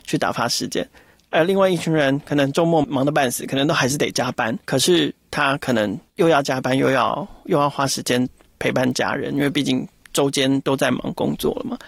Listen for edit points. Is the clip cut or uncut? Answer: cut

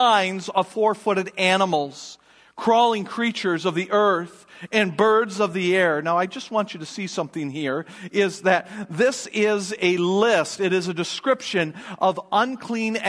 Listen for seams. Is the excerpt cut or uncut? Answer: uncut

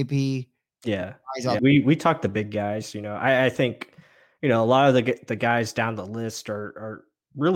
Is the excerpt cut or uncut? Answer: cut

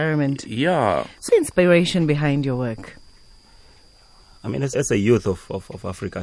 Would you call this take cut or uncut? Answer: cut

